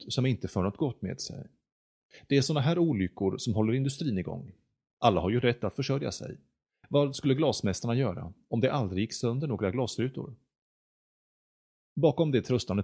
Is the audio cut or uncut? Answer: uncut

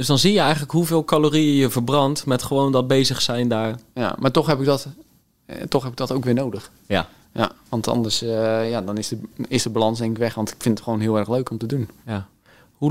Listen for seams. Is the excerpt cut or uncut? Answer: uncut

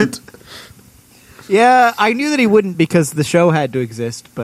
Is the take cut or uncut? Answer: uncut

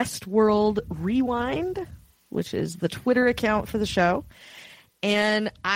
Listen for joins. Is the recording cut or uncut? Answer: uncut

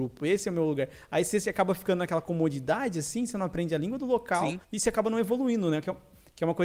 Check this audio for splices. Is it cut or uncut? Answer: cut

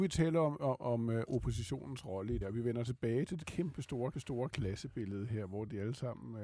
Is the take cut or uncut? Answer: cut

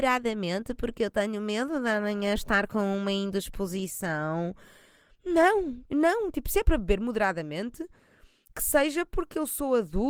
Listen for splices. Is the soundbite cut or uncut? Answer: uncut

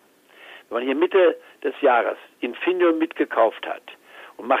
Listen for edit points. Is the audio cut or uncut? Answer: uncut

